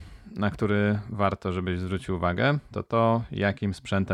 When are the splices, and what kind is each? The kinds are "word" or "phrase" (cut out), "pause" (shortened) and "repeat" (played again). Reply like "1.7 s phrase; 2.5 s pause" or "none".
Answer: none